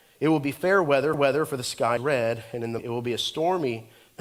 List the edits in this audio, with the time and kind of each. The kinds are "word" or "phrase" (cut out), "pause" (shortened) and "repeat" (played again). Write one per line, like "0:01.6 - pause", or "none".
0:01.1 - repeat
0:02.0 - word
0:02.8 - word